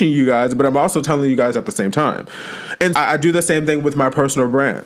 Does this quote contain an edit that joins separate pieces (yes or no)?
yes